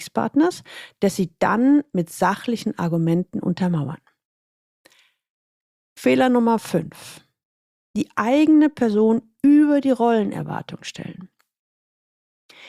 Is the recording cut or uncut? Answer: uncut